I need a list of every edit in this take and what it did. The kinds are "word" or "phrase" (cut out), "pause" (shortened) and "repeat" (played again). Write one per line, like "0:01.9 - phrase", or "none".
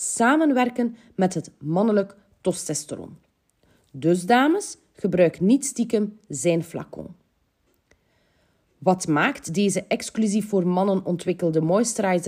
none

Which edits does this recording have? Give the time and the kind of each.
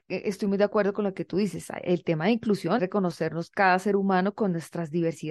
0:02.8 - word

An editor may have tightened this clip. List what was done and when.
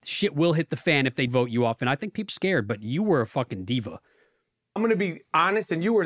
0:01.3 - word
0:02.3 - word
0:04.8 - word

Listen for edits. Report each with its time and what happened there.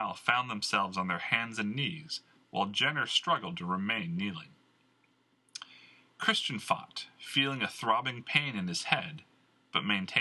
none

